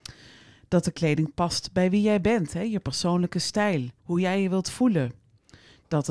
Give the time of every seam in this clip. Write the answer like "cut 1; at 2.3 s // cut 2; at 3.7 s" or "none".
cut 1; at 4.0 s